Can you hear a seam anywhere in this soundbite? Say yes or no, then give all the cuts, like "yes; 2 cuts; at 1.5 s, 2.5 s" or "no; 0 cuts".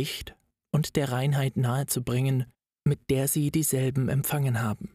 yes; 1 cut; at 2.5 s